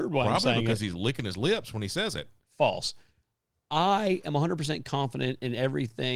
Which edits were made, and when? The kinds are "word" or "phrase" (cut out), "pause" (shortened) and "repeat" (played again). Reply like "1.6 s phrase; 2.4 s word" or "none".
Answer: none